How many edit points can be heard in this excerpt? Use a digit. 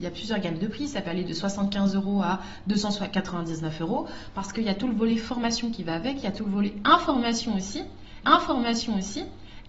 1